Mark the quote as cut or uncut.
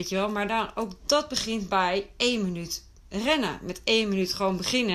uncut